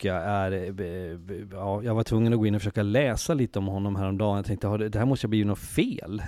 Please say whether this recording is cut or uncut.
uncut